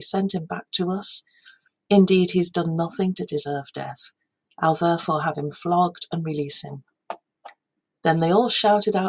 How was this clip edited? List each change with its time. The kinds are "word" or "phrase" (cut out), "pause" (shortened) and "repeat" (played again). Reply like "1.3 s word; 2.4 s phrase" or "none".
none